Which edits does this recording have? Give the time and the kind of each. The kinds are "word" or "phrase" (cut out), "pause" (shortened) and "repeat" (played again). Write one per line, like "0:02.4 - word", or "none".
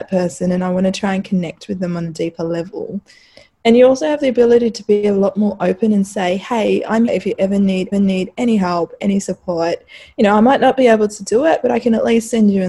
0:07.1 - word
0:07.9 - repeat